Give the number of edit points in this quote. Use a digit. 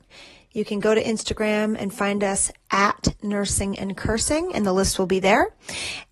0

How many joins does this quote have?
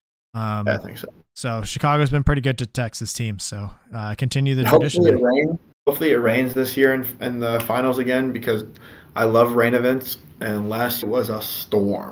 3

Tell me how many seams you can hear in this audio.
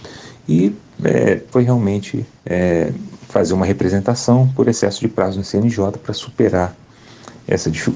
2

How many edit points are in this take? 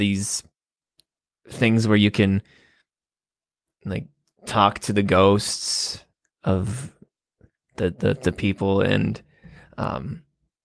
0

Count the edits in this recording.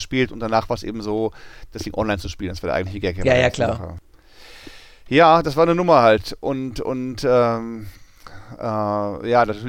0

